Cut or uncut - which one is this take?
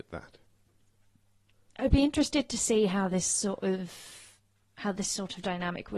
uncut